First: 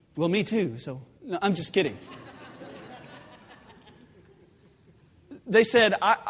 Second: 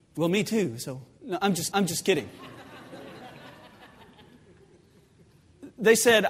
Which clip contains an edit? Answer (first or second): second